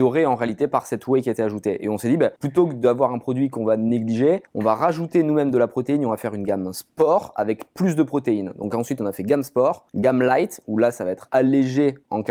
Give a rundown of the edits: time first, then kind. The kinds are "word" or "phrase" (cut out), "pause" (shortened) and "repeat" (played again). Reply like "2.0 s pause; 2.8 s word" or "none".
2.4 s pause; 4.5 s pause; 9.9 s pause